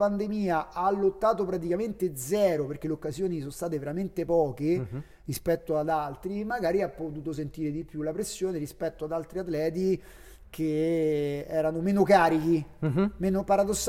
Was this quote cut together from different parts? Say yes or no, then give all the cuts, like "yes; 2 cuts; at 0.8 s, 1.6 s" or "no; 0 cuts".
no; 0 cuts